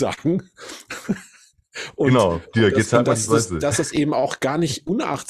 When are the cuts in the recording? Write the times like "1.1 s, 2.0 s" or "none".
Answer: none